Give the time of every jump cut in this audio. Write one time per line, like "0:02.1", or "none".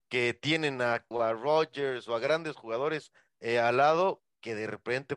0:01.1